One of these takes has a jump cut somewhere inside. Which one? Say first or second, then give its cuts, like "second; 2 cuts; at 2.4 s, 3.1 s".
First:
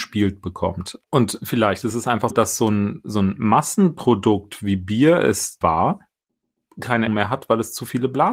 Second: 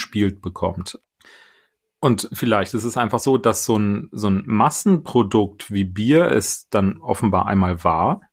first; 4 cuts; at 1.1 s, 2.3 s, 5.6 s, 7.1 s